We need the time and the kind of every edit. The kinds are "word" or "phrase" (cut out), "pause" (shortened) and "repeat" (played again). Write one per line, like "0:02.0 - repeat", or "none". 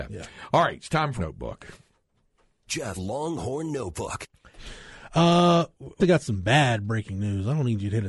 0:01.2 - word
0:03.0 - word
0:06.0 - word

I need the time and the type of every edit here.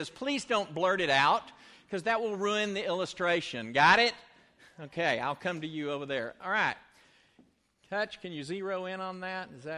none

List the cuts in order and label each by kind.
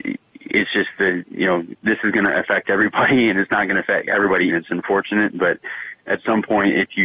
0:01.8 - pause
0:04.5 - word

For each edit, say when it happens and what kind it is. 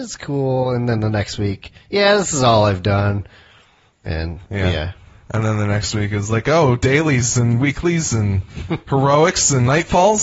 0:01.8 - pause

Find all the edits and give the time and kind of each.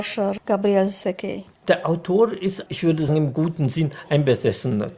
0:02.7 - word
0:03.1 - word

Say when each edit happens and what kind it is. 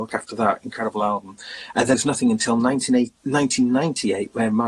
0:01.9 - word

